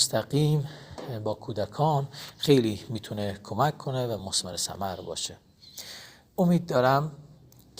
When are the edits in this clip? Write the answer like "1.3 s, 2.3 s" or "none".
none